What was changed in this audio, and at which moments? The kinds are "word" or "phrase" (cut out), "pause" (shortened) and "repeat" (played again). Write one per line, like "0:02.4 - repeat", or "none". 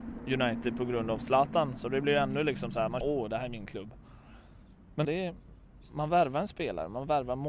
0:03.0 - word
0:05.0 - word

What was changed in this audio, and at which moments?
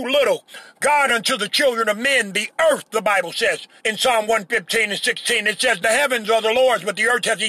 0:01.1 - phrase
0:03.8 - pause
0:05.8 - phrase

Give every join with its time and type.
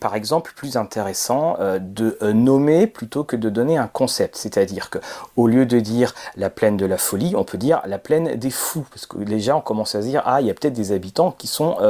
none

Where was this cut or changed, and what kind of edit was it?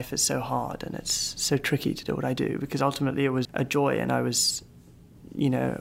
0:03.4 - word

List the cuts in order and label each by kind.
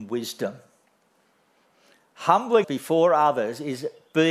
0:02.6 - word

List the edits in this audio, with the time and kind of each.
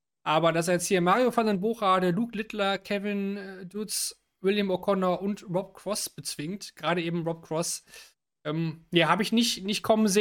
none

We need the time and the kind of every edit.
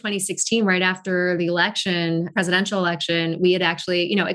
none

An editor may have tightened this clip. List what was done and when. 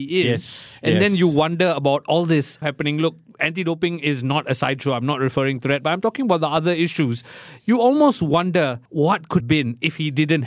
0:02.6 - word
0:08.9 - pause
0:09.4 - word

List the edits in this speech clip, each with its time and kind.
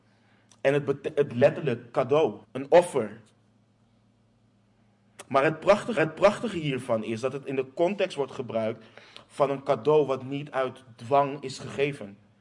0:01.3 - word
0:02.4 - pause
0:06.0 - repeat

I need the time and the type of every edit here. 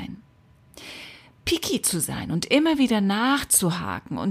none

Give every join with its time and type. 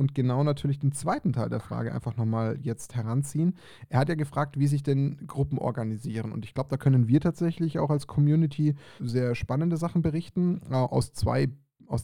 0:09.0 - phrase

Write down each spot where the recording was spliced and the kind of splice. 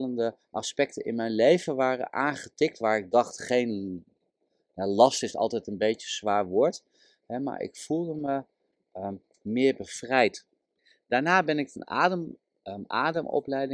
none

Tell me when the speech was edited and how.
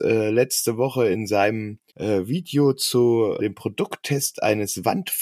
0:01.9 - pause
0:03.4 - word

